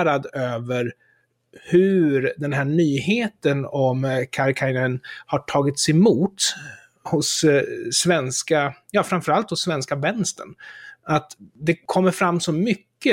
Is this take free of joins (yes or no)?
yes